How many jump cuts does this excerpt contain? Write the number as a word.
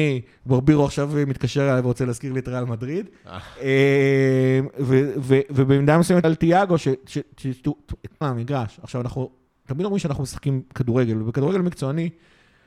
two